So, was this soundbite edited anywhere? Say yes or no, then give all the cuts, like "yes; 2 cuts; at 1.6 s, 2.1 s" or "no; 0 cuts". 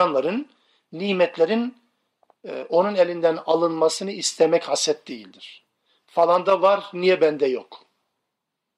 no; 0 cuts